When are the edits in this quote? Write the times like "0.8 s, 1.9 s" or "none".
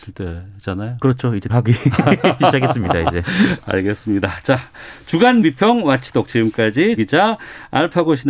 1.5 s, 5.4 s, 7.0 s